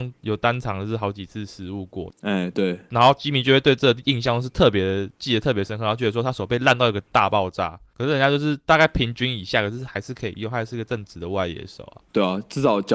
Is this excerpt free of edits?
no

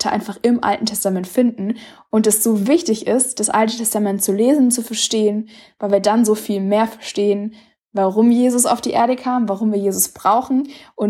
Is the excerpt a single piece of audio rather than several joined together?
yes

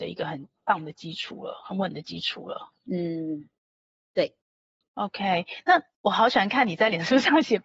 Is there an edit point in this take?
no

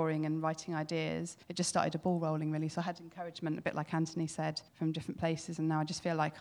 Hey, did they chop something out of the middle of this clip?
yes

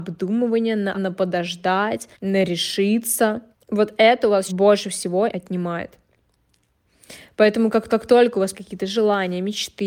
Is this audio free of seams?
no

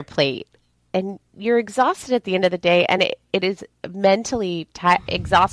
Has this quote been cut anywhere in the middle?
no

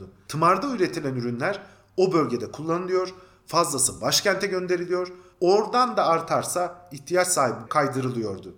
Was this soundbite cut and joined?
yes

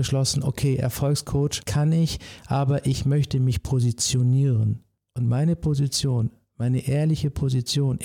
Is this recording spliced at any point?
no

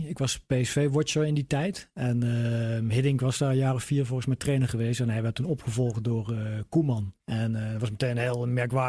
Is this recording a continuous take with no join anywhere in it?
no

